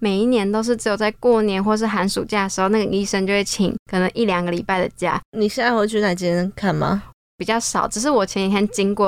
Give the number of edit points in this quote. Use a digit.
1